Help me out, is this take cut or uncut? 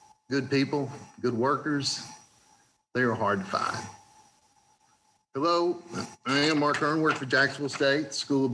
uncut